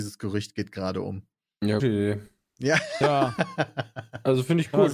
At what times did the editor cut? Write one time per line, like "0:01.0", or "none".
0:01.8